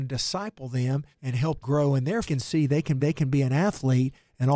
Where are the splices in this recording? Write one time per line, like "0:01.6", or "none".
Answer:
0:01.1
0:01.6
0:02.2
0:03.0